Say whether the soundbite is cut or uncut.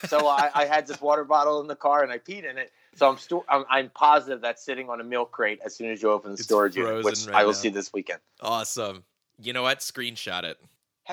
uncut